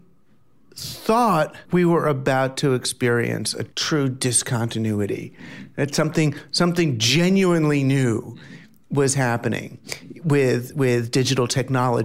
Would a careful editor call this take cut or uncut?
cut